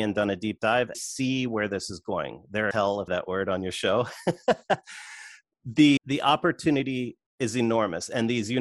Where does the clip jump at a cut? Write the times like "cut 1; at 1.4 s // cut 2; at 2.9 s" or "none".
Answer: cut 1; at 0.9 s // cut 2; at 2.7 s // cut 3; at 3.1 s // cut 4; at 6.0 s // cut 5; at 7.3 s